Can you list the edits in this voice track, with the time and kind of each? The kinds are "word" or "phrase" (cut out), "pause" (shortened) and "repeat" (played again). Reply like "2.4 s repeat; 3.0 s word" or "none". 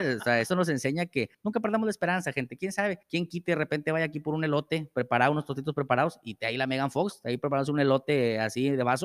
1.3 s pause; 3.0 s pause